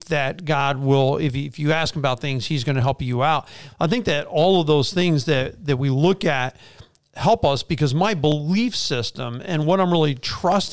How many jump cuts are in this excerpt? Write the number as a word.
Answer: zero